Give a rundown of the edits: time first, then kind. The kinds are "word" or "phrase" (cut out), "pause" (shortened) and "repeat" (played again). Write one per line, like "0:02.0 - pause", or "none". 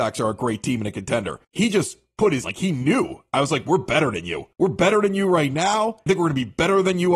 0:01.4 - pause
0:02.4 - phrase
0:04.5 - pause
0:06.1 - phrase